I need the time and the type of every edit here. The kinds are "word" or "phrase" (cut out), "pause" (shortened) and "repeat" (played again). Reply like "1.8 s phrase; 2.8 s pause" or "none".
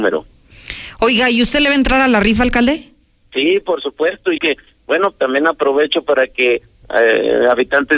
4.4 s word; 6.8 s word